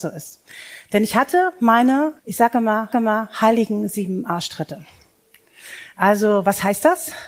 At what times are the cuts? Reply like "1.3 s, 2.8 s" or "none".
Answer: 2.2 s, 2.9 s